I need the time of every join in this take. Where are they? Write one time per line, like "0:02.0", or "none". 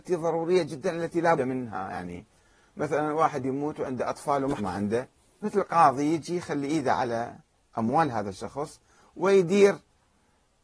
0:01.4
0:04.6
0:05.4